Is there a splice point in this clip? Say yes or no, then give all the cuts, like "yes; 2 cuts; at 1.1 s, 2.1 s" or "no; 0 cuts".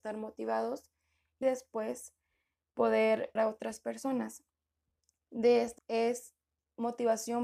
yes; 3 cuts; at 1.4 s, 3.4 s, 5.8 s